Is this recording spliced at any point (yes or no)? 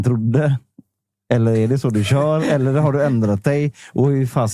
no